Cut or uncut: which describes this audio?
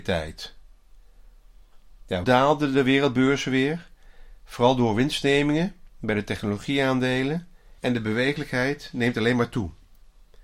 cut